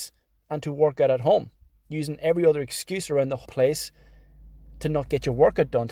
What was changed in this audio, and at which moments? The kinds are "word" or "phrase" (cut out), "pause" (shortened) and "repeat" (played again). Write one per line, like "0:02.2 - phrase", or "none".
0:03.5 - word